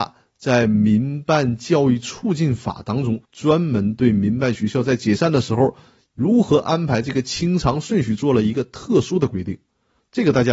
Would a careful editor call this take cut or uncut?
cut